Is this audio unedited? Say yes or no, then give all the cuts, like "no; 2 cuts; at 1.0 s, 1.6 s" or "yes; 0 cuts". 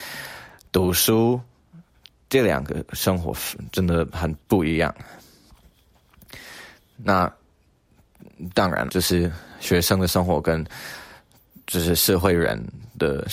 no; 1 cut; at 8.9 s